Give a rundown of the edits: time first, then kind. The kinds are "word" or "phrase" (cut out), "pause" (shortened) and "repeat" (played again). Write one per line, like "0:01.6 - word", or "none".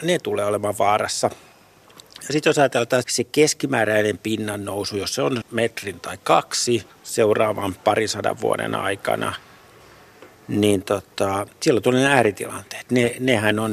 0:03.0 - word
0:05.4 - word
0:11.5 - pause